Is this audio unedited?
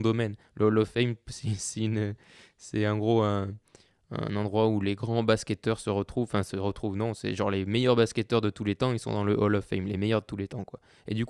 yes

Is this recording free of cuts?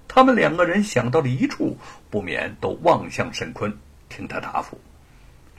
yes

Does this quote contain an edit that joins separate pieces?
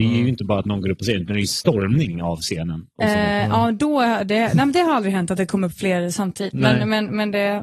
no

